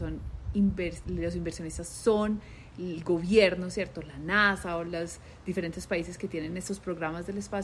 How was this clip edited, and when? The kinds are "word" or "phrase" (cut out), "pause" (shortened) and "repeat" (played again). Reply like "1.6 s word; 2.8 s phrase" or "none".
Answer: 1.0 s word